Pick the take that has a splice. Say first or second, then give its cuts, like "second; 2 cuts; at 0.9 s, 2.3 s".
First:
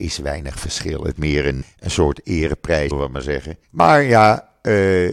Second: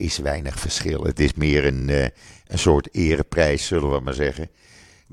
first; 4 cuts; at 1.1 s, 1.6 s, 2.9 s, 3.6 s